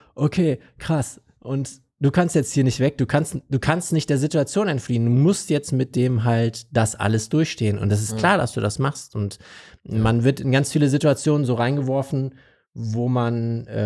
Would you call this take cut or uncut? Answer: uncut